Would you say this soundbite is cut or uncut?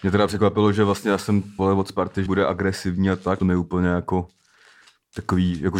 cut